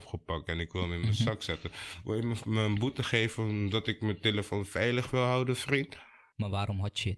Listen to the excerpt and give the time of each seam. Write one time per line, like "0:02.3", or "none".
none